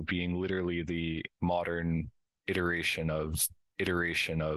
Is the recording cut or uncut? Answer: cut